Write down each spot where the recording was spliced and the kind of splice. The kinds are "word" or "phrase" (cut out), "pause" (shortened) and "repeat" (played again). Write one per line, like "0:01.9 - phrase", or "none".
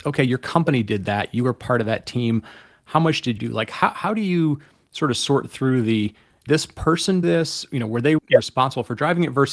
0:03.4 - word
0:06.5 - word
0:07.2 - word
0:08.2 - word